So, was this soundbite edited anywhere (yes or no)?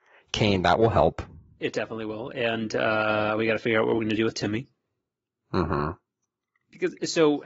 no